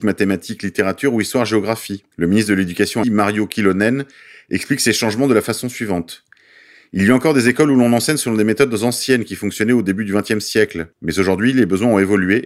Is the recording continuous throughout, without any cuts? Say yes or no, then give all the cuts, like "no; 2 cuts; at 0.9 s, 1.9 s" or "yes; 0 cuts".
no; 3 cuts; at 2.1 s, 3.0 s, 10.9 s